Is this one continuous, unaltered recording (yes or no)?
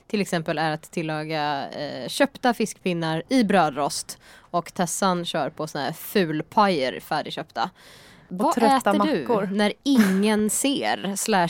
yes